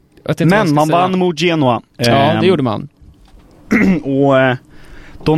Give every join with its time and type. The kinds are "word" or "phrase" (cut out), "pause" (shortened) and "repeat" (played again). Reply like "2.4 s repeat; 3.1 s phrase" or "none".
1.9 s pause